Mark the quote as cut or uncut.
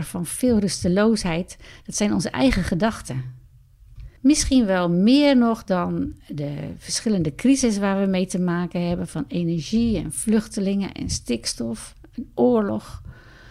cut